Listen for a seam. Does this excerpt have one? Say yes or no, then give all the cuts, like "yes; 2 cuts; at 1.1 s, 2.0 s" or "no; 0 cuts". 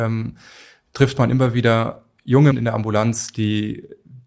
yes; 1 cut; at 2.5 s